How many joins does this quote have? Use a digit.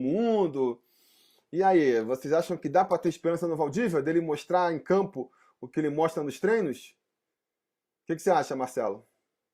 0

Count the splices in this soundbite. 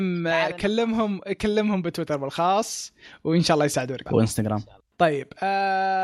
1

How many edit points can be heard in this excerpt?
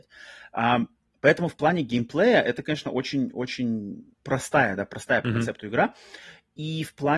1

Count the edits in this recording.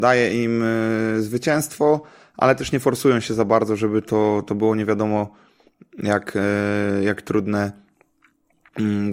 0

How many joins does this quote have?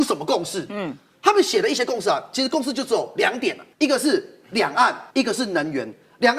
2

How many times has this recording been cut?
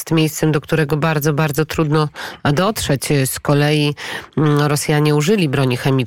0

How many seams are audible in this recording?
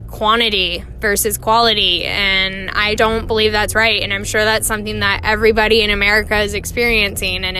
1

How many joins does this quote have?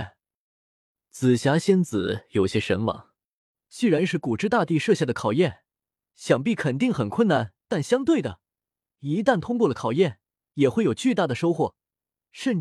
0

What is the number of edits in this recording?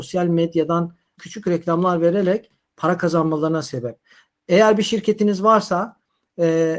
1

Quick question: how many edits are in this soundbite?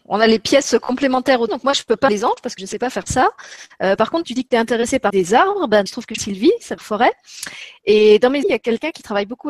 9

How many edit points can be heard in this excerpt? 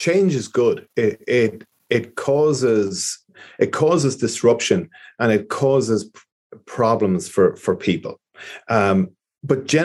0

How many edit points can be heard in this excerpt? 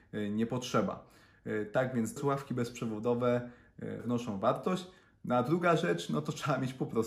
2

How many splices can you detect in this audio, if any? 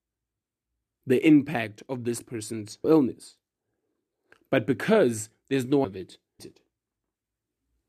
3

